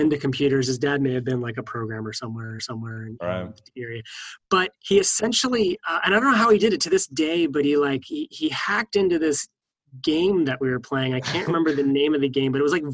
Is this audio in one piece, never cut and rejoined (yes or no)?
no